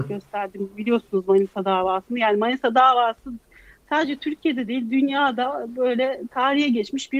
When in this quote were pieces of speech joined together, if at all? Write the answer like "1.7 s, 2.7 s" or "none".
none